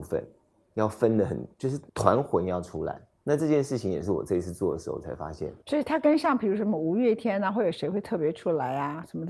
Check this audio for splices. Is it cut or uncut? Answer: cut